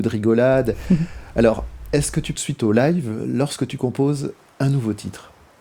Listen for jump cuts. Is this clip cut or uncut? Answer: cut